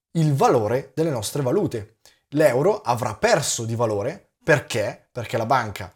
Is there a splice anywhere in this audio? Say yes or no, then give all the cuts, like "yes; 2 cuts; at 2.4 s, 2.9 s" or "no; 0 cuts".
no; 0 cuts